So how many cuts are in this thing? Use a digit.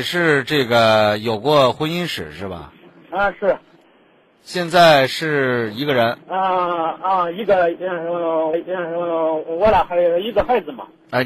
2